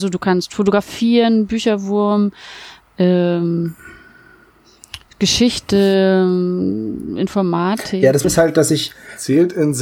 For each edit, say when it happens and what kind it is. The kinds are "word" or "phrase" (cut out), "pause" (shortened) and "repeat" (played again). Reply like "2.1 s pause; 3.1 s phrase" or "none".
8.2 s word